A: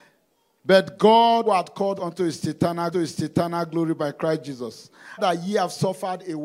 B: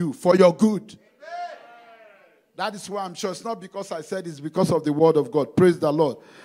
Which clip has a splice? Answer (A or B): A